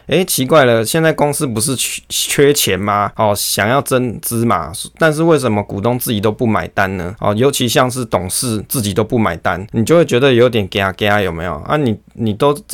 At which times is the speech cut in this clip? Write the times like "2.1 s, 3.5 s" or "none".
none